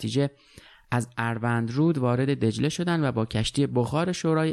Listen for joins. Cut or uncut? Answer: uncut